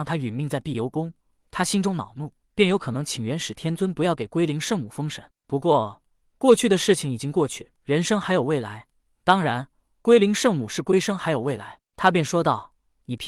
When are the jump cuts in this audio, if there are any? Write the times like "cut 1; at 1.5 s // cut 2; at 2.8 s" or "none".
cut 1; at 2.4 s // cut 2; at 7.8 s